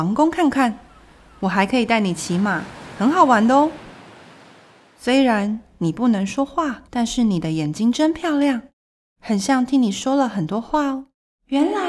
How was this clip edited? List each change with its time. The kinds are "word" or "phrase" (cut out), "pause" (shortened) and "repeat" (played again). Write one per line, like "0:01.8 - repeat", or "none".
0:06.9 - pause